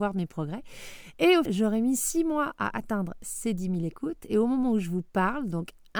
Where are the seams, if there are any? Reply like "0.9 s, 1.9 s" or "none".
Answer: 1.5 s

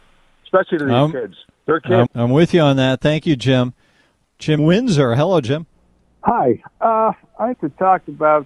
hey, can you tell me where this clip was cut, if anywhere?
2.1 s, 4.6 s, 7.5 s

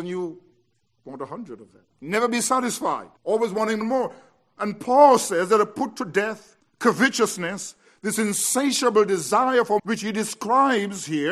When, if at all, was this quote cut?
1.9 s, 3.2 s, 3.8 s, 6.6 s, 9.8 s

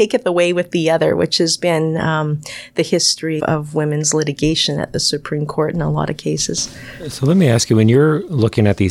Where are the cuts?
3.4 s

